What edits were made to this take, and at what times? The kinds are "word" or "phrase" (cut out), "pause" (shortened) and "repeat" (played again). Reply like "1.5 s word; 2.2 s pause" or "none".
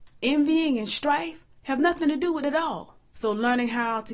2.4 s word